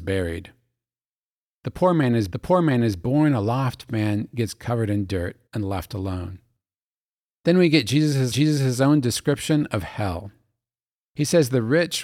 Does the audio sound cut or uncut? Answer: cut